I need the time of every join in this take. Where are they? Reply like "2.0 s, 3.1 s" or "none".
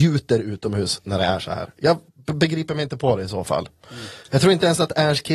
2.1 s